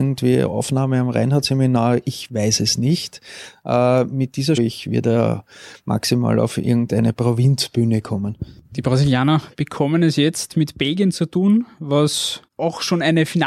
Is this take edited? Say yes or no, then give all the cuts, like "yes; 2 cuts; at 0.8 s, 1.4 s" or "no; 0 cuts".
yes; 1 cut; at 4.6 s